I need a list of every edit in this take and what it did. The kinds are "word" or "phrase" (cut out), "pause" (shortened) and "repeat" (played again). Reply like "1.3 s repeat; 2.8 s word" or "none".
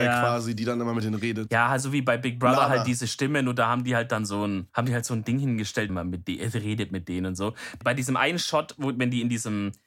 4.7 s pause; 5.9 s phrase; 7.8 s word

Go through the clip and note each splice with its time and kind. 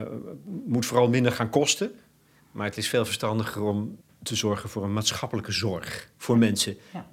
4.0 s pause

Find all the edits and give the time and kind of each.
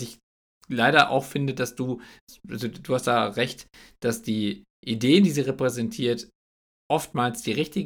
none

